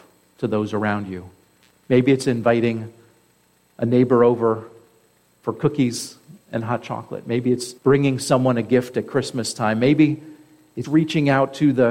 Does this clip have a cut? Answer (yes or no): yes